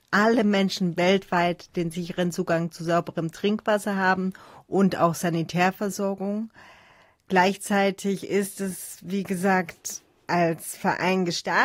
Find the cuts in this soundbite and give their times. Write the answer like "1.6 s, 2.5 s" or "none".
none